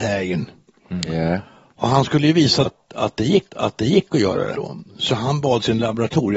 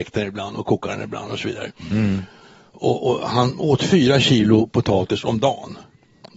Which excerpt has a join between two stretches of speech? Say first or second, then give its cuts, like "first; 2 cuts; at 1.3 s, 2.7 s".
first; 3 cuts; at 2.6 s, 3.5 s, 4.5 s